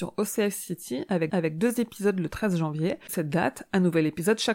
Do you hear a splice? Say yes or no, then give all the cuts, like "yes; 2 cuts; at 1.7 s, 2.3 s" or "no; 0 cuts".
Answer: yes; 2 cuts; at 1.3 s, 3.1 s